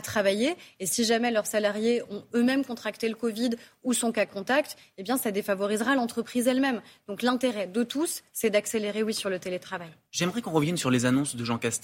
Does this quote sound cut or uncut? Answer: uncut